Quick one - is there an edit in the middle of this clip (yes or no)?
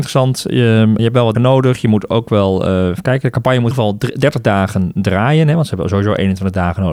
yes